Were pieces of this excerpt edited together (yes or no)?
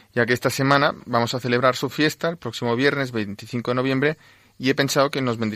no